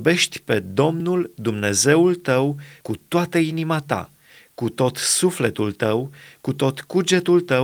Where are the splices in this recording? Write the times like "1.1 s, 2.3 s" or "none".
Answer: none